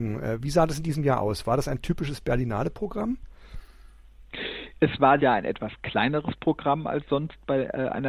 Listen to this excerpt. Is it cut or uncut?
cut